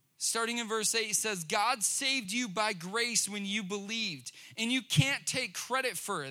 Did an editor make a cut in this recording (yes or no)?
no